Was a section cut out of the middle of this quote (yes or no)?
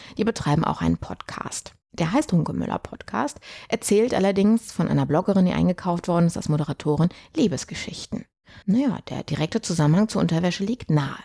yes